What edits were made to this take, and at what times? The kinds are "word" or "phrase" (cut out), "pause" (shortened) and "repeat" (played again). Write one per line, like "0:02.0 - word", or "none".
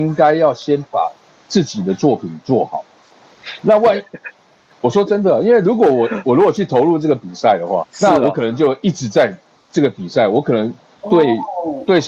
0:07.8 - word